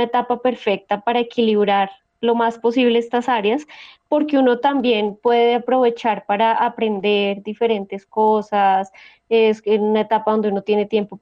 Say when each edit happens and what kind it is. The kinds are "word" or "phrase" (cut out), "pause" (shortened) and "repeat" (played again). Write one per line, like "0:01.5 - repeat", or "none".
none

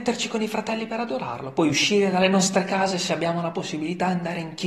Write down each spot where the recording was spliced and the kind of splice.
none

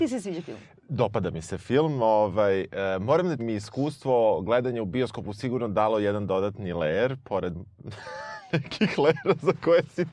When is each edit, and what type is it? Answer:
0:03.4 - phrase

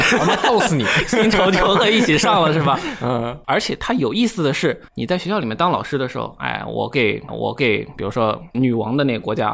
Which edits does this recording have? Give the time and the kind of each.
0:04.9 - pause
0:07.3 - repeat
0:08.5 - word

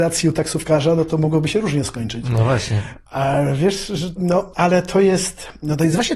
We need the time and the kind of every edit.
0:04.2 - word

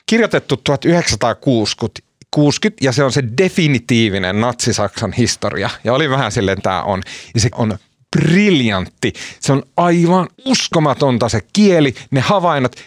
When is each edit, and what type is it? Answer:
0:06.6 - word
0:07.5 - word
0:10.3 - pause

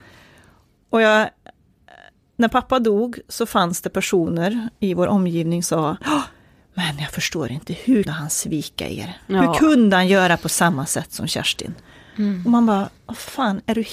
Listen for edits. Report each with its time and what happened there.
0:05.6 - word
0:08.1 - word
0:13.0 - pause

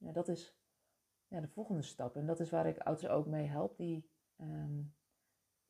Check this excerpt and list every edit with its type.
0:03.0 - word
0:04.3 - pause

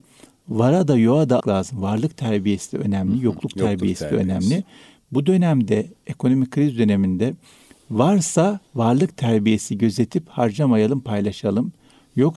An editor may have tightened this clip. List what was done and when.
0:01.4 - word
0:08.7 - pause

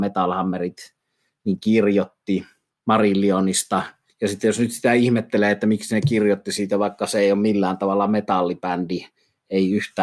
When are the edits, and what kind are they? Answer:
none

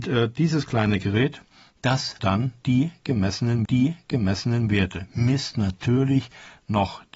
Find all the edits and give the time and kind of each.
0:02.2 - word
0:03.7 - repeat

